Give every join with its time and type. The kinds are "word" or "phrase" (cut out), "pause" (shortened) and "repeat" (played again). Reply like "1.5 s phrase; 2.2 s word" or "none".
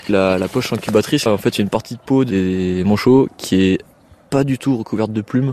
1.3 s word